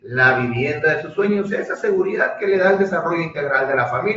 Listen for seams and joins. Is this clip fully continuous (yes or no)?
yes